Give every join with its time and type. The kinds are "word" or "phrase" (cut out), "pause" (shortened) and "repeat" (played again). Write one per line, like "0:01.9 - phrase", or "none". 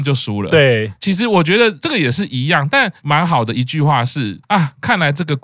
0:04.4 - pause